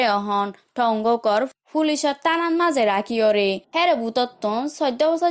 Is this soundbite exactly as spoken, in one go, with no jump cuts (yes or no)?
no